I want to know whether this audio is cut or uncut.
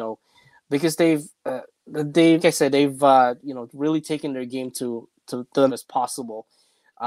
cut